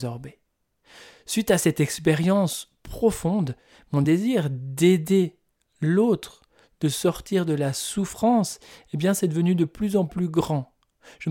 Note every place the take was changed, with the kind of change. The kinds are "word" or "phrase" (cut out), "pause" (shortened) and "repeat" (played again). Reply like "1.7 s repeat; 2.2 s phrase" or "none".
none